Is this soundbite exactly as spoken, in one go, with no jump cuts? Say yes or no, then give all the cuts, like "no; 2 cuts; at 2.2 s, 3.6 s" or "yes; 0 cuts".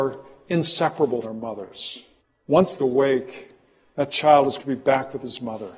no; 4 cuts; at 1.2 s, 2.2 s, 2.8 s, 4.6 s